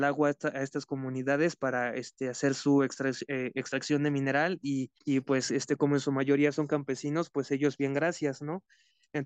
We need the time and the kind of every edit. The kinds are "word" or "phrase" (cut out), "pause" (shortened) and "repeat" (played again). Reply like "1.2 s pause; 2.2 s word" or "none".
5.0 s pause